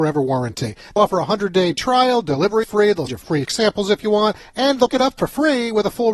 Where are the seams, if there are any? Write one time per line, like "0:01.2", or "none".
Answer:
0:01.0
0:02.6
0:03.1
0:03.5
0:04.9